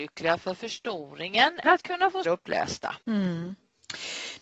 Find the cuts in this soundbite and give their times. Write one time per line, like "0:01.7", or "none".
0:01.6
0:02.2
0:03.0